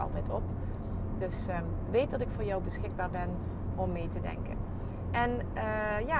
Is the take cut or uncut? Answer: uncut